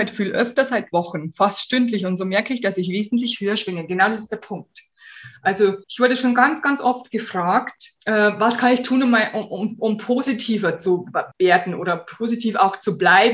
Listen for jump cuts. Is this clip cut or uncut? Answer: cut